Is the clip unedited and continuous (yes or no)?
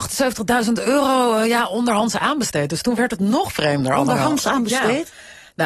yes